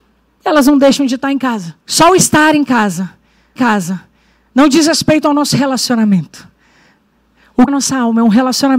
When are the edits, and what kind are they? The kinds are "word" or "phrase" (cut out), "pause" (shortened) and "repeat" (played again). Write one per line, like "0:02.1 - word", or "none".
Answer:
0:01.8 - pause
0:03.6 - repeat
0:07.7 - phrase